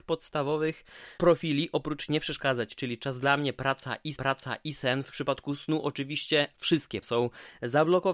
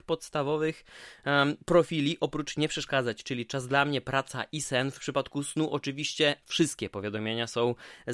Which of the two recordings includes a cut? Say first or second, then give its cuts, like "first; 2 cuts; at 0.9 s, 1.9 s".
first; 3 cuts; at 1.2 s, 4.1 s, 7.0 s